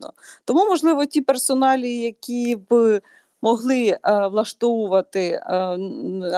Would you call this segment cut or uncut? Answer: uncut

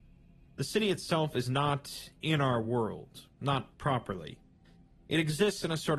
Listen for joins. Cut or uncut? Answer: uncut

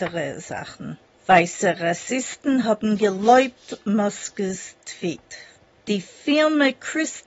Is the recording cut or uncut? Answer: uncut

